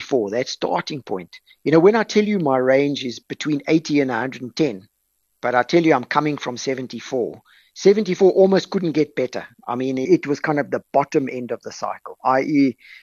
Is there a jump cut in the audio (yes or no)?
no